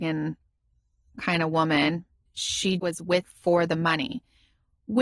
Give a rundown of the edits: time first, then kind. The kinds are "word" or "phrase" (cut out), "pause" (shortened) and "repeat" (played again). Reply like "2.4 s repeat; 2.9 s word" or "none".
2.3 s word; 2.8 s word; 3.2 s word